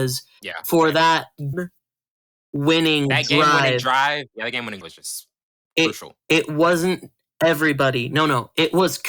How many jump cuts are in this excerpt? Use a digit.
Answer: 2